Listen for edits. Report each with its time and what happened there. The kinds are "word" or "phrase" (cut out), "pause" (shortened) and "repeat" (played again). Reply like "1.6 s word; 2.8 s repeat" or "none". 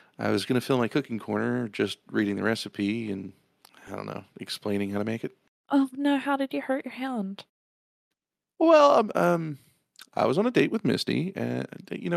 5.6 s pause